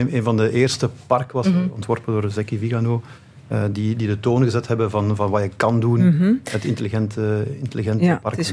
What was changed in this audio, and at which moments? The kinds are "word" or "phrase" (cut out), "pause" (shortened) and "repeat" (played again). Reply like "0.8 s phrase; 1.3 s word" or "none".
none